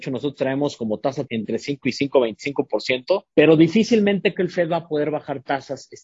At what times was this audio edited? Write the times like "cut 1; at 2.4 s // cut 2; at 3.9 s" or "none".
cut 1; at 1.3 s // cut 2; at 3.3 s // cut 3; at 4.3 s